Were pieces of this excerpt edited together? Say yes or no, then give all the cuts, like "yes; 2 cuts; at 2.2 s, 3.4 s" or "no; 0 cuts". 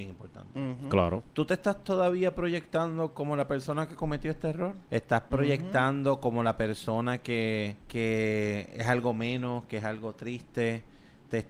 yes; 2 cuts; at 4.9 s, 7.8 s